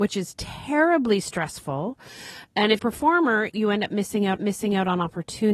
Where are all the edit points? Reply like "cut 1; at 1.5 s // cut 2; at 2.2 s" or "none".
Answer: cut 1; at 2.8 s // cut 2; at 3.5 s // cut 3; at 4.4 s